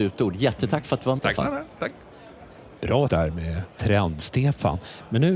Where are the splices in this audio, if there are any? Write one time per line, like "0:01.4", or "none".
0:01.2
0:03.1